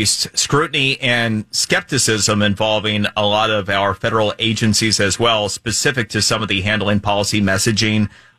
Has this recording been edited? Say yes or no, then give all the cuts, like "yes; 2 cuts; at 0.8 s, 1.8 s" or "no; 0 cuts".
no; 0 cuts